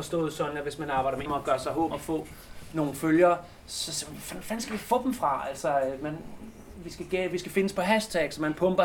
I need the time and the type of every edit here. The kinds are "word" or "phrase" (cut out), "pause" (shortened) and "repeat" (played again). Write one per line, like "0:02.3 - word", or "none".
0:01.3 - word
0:01.9 - word